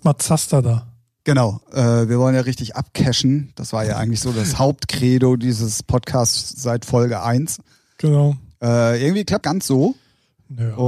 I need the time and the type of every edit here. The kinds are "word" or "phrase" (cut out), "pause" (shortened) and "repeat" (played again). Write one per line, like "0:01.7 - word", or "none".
0:09.4 - phrase